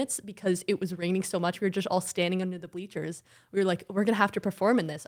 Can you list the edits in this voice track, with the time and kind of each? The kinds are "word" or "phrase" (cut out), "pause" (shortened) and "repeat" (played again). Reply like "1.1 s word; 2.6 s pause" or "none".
none